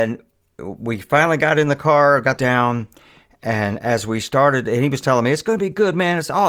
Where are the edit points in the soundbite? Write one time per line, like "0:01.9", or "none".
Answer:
0:02.4